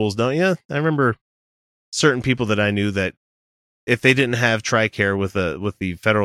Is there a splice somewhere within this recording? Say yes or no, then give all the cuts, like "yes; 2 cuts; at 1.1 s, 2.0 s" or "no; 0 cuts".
no; 0 cuts